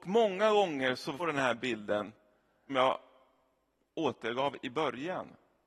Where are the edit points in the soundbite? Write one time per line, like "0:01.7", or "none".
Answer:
0:01.2
0:02.7